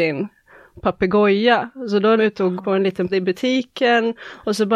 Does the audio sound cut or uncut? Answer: cut